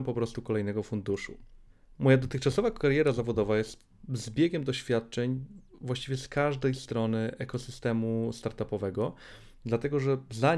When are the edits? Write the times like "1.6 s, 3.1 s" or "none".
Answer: 1.7 s